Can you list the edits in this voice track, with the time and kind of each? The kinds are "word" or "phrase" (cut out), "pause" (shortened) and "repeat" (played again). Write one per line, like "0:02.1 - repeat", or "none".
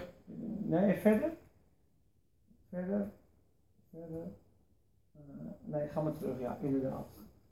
none